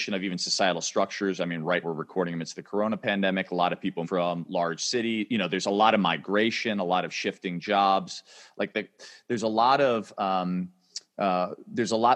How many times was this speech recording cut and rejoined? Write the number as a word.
two